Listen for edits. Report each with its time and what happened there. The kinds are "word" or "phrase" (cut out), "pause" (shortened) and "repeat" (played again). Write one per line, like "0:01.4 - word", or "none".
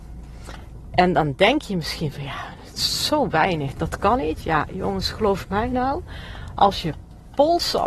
0:03.7 - word